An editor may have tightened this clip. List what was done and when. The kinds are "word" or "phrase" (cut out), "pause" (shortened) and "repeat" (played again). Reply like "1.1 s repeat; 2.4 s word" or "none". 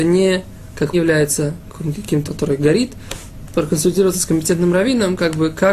0.9 s phrase; 2.3 s word